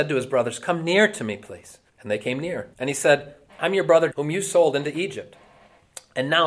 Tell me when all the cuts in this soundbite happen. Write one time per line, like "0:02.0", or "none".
0:01.9
0:02.7
0:04.1